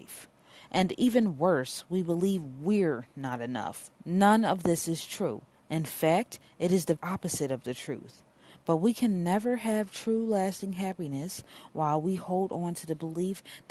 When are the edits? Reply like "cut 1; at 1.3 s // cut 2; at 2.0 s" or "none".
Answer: cut 1; at 3.9 s // cut 2; at 7.0 s